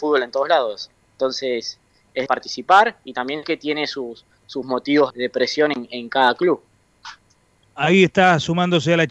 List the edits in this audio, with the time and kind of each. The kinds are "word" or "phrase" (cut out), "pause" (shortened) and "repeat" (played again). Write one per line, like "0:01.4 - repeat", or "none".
0:02.3 - word
0:03.4 - word
0:05.1 - word